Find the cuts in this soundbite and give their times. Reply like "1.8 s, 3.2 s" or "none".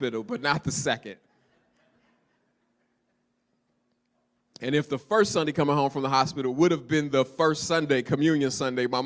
none